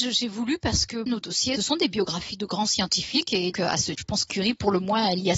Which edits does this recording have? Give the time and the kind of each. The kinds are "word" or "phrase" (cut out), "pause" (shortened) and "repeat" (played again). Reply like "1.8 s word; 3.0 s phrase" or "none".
1.1 s word; 1.6 s word; 3.5 s word; 4.0 s word; 4.3 s word